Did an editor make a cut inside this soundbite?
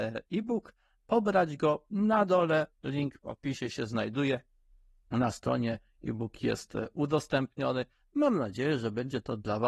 no; 0 cuts

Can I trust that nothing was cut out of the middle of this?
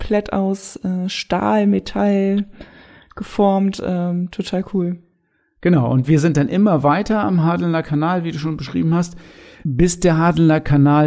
yes; 0 cuts

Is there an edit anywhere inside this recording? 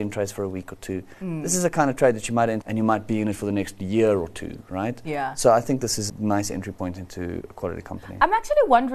yes; 2 cuts; at 2.6 s, 6.1 s

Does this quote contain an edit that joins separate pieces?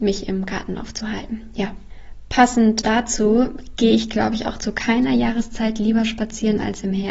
yes; 1 cut; at 2.8 s

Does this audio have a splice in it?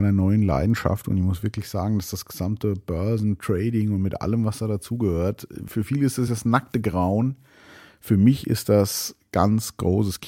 no; 0 cuts

